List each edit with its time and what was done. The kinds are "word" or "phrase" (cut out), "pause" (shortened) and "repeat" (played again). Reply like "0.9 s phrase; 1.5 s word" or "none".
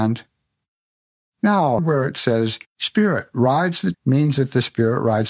1.8 s word; 2.7 s pause; 3.9 s word